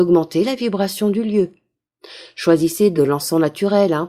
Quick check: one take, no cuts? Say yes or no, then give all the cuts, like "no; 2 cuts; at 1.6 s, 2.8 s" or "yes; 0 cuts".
yes; 0 cuts